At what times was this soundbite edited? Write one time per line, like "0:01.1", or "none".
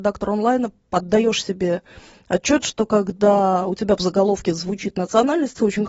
none